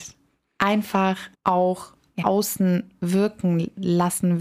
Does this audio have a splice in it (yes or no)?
yes